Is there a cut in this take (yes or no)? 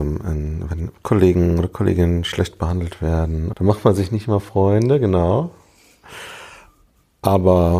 yes